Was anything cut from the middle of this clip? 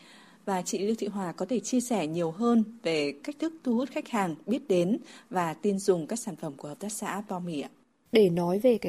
no; 0 cuts

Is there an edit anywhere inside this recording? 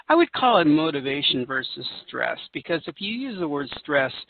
no; 0 cuts

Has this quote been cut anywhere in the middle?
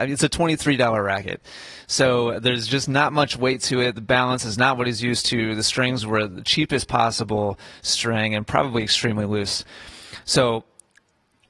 no; 0 cuts

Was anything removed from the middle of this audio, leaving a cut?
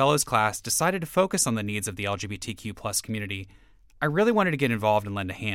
no; 0 cuts

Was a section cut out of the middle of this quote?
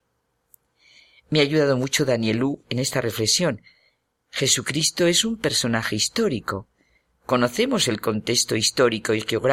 no; 0 cuts

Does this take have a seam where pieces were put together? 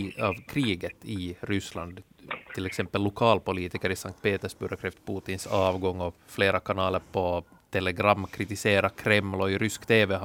yes; 1 cut; at 7.0 s

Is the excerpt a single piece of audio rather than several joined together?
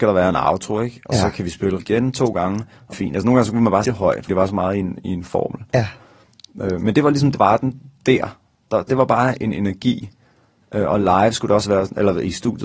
no; 7 cuts; at 1.8 s, 2.9 s, 3.8 s, 4.3 s, 7.3 s, 8.9 s, 11.6 s

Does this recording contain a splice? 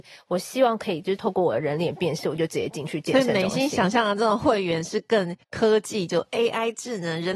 yes; 1 cut; at 5.4 s

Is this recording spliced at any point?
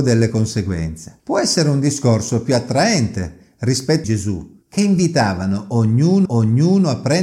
yes; 4 cuts; at 1.2 s, 4.0 s, 4.6 s, 6.3 s

